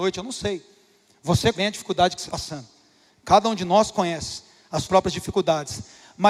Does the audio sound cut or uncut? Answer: cut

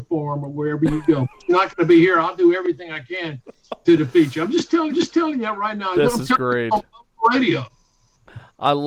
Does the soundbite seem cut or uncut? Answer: cut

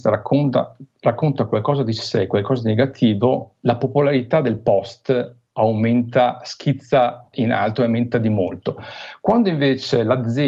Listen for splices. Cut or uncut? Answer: uncut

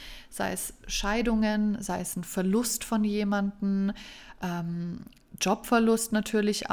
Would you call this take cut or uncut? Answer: uncut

